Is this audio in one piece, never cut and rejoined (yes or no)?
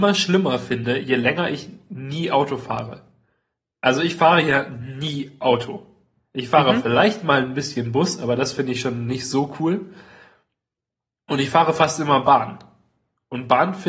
yes